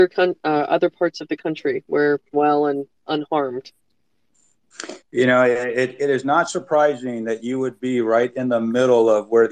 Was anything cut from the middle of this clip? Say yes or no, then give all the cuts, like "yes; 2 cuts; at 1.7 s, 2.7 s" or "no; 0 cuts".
yes; 1 cut; at 2.3 s